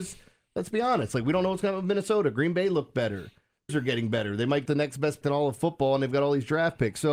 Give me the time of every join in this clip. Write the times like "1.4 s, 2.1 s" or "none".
3.7 s, 4.7 s, 5.2 s